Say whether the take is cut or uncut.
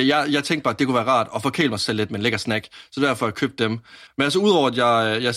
cut